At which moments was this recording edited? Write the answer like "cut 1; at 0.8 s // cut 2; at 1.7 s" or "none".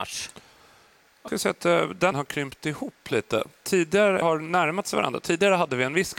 cut 1; at 1.3 s // cut 2; at 2.1 s // cut 3; at 4.2 s